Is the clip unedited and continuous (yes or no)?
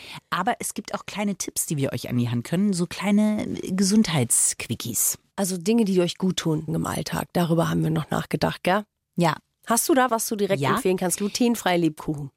no